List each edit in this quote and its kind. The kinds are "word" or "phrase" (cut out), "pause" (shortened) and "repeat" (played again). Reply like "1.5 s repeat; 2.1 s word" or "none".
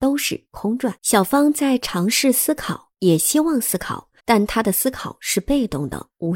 1.0 s pause; 2.9 s pause; 4.2 s pause